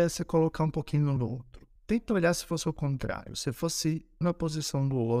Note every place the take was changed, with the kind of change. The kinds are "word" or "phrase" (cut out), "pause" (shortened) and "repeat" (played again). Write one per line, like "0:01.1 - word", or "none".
0:01.2 - word
0:01.8 - pause
0:04.2 - word

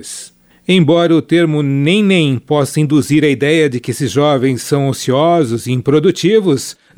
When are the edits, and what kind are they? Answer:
none

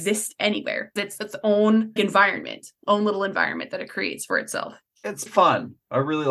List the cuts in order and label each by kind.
0:01.0 - word
0:02.0 - word
0:05.3 - word

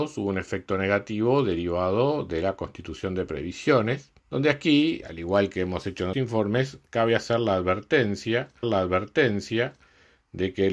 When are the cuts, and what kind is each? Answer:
0:04.2 - pause
0:05.0 - word
0:06.1 - word
0:08.6 - repeat

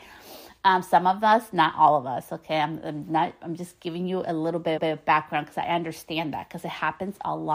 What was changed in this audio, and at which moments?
0:04.8 - repeat

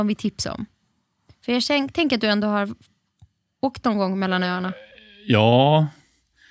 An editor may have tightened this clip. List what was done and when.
none

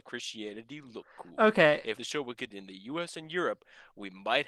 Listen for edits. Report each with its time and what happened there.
0:02.0 - phrase
0:02.5 - word

